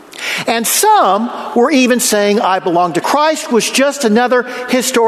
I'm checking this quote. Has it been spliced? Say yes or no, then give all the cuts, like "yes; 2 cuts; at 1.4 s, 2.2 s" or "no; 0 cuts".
yes; 1 cut; at 3.0 s